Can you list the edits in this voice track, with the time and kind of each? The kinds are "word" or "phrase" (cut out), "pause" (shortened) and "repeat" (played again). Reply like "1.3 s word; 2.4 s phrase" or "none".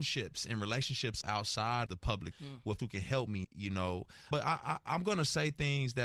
1.2 s word; 1.9 s word; 2.3 s word; 2.8 s word; 3.4 s word; 4.3 s word